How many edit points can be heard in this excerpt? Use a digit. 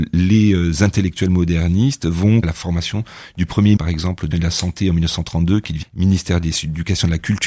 4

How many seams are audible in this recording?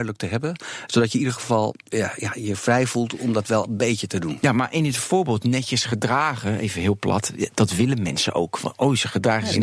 1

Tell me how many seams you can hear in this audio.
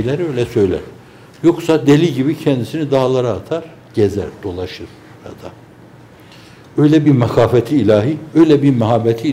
0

